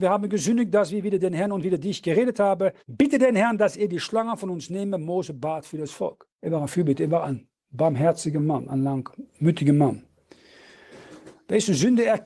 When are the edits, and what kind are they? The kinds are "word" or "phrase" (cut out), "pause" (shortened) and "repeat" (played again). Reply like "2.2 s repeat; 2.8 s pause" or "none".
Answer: 2.8 s pause; 6.3 s pause